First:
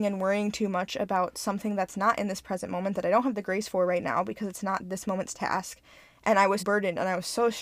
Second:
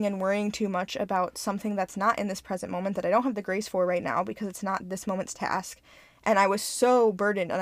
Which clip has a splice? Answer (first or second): first